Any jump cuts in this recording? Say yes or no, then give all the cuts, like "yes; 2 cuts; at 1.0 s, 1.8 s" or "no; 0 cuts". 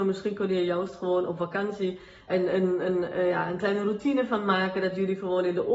yes; 1 cut; at 2.3 s